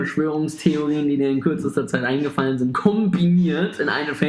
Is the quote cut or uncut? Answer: uncut